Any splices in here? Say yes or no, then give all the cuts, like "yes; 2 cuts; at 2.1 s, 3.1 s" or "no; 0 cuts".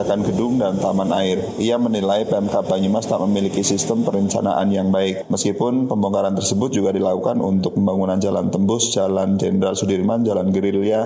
no; 0 cuts